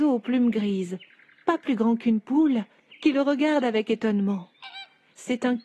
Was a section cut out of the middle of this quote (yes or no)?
no